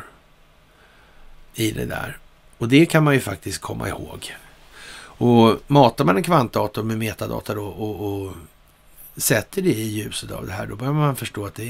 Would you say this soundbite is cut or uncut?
uncut